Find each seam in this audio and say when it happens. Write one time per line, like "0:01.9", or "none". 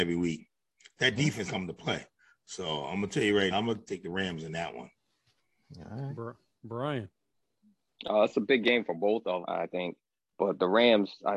0:01.5
0:03.5
0:03.9
0:09.4